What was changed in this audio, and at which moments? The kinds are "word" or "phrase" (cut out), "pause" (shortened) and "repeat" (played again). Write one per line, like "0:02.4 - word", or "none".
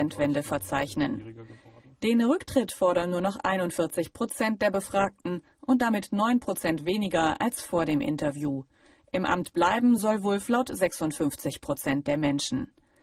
none